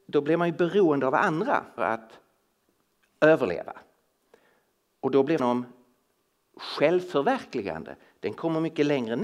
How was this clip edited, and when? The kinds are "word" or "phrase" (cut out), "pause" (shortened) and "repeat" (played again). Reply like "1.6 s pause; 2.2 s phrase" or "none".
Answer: 1.8 s word; 5.4 s word